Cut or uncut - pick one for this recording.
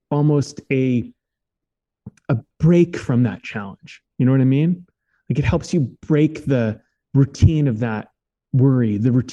uncut